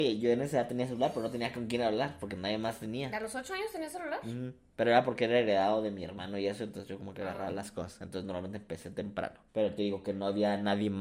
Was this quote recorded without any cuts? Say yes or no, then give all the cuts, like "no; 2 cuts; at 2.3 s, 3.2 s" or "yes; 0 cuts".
no; 1 cut; at 9.5 s